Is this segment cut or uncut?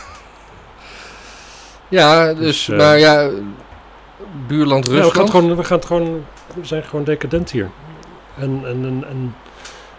uncut